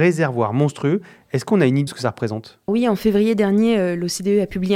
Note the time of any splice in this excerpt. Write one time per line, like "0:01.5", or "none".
0:01.9
0:02.7

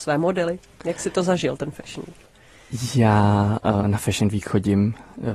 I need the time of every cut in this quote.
none

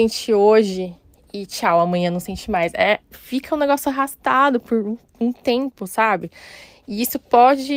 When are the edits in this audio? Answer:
none

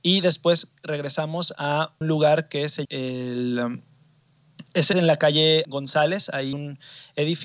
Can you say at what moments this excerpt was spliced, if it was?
0:02.0
0:02.8
0:04.9
0:05.6
0:06.5

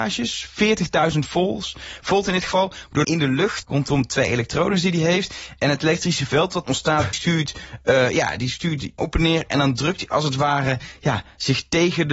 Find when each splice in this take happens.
0:03.0
0:03.6
0:06.6
0:07.1
0:09.0

